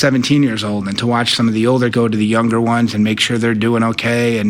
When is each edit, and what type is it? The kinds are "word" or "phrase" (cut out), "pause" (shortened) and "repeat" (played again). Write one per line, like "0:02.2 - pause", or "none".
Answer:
0:01.9 - word

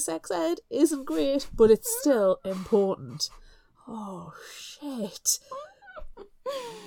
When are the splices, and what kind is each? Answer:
none

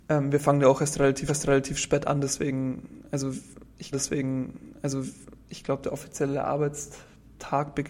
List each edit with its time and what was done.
0:01.3 - repeat
0:03.9 - repeat

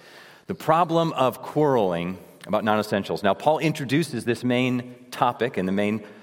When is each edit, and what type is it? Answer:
none

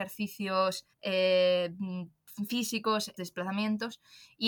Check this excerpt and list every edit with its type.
0:00.9 - pause
0:03.2 - word

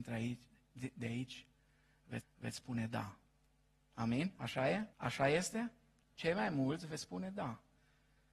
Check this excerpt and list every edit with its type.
0:02.2 - repeat
0:04.9 - pause

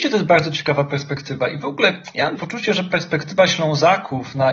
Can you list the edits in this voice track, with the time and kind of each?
0:02.4 - word

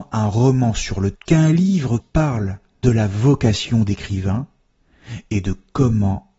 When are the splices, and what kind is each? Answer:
0:01.1 - word
0:02.0 - word
0:02.8 - word

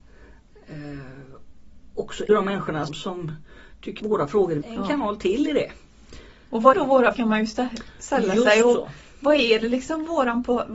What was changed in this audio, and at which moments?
0:02.3 - word
0:02.9 - word
0:04.0 - word
0:04.6 - word
0:06.7 - word
0:07.1 - word

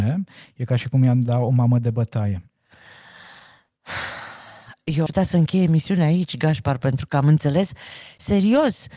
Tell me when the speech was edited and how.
0:05.1 - word

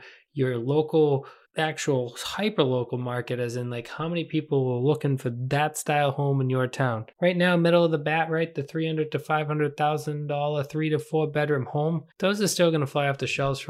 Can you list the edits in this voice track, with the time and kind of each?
0:01.4 - pause
0:07.1 - pause
0:12.1 - pause

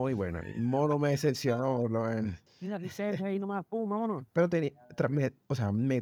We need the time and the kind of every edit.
0:02.5 - pause

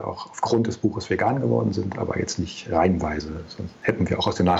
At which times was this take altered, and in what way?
none

